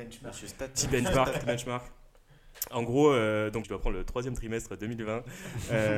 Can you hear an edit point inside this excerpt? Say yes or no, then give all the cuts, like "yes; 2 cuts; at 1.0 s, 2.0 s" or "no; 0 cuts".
yes; 2 cuts; at 1.4 s, 3.6 s